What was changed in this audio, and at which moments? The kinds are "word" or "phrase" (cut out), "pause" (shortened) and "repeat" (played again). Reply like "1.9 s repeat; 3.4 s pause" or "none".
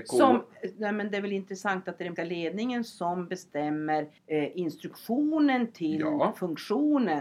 2.2 s word; 4.2 s pause